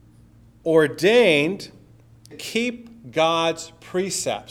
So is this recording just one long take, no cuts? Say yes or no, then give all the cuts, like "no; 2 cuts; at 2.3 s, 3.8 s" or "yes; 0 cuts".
no; 1 cut; at 2.3 s